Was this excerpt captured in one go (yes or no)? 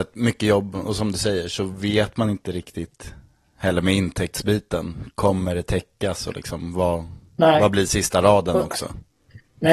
yes